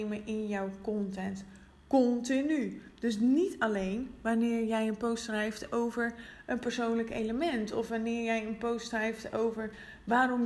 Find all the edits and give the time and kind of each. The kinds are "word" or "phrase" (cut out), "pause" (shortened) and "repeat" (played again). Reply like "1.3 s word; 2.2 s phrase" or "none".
none